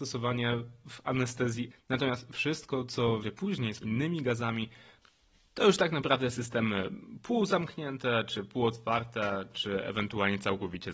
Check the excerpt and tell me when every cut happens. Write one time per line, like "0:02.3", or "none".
0:01.7
0:03.2
0:03.8